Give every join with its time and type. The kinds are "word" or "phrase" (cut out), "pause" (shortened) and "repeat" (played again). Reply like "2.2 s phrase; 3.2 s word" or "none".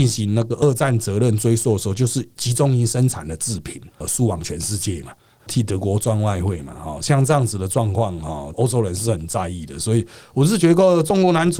none